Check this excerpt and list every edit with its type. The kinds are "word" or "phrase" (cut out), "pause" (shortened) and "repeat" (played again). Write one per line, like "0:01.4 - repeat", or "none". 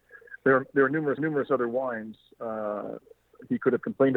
0:01.2 - repeat